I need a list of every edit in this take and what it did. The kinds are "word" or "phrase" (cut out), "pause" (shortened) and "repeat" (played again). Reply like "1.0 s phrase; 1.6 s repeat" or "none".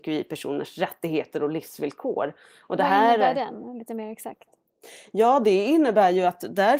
none